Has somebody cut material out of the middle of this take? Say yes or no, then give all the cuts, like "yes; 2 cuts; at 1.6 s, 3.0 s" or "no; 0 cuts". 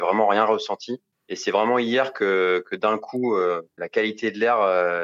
no; 0 cuts